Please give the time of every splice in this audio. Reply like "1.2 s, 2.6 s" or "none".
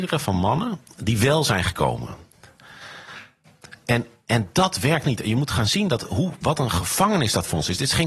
5.0 s

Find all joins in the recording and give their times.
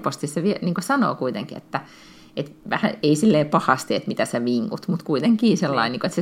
none

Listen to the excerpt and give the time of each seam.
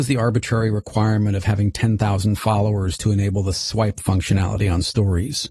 4.0 s

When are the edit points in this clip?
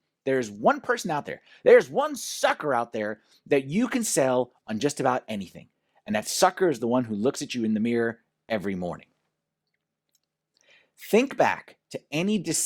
none

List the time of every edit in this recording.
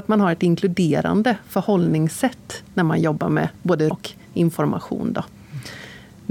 3.9 s

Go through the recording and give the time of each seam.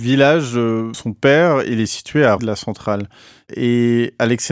0.9 s, 2.4 s

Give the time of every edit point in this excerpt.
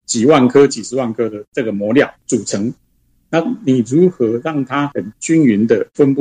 none

